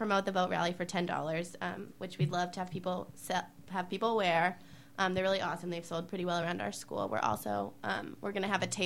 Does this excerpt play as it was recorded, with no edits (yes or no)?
yes